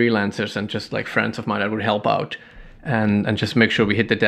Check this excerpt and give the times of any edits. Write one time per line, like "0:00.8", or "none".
none